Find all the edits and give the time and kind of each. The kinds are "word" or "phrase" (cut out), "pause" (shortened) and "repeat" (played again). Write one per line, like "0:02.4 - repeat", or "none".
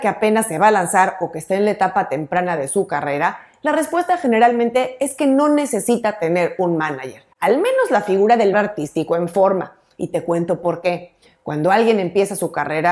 0:07.3 - pause
0:08.5 - word
0:11.3 - pause